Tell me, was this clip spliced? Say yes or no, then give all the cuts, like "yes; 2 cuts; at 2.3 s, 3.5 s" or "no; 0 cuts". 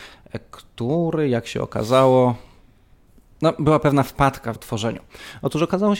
yes; 1 cut; at 4.6 s